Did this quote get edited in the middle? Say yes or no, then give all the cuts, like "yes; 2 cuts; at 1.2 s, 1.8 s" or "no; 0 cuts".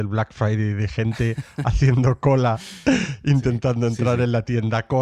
no; 0 cuts